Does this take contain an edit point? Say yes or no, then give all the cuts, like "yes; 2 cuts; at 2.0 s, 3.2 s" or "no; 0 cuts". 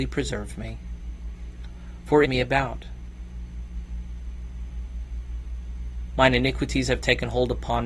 yes; 1 cut; at 2.2 s